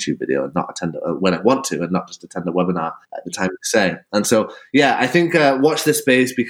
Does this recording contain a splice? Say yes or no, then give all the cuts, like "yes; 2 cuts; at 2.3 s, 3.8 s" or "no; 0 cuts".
yes; 1 cut; at 3.0 s